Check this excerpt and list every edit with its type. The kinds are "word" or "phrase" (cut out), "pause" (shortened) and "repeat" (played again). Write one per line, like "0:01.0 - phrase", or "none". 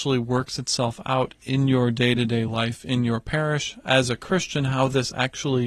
none

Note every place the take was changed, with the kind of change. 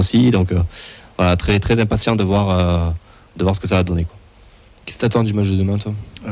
none

